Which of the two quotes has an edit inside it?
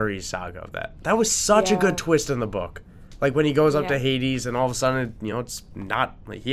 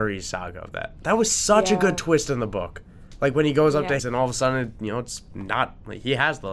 second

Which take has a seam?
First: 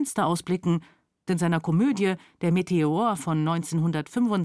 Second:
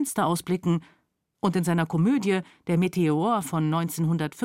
first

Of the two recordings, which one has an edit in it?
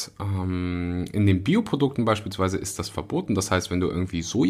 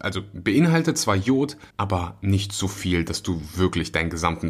second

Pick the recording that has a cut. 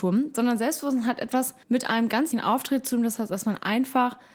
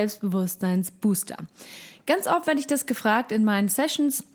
first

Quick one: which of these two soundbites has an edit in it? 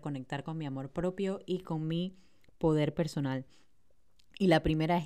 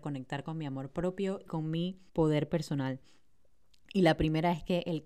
second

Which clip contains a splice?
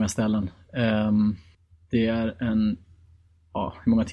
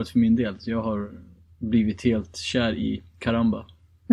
first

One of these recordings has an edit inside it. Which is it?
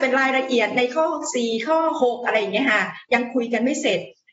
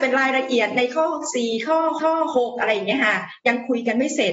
second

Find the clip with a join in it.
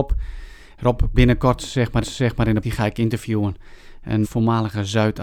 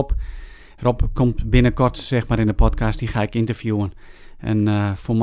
first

